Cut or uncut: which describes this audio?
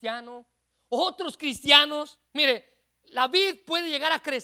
cut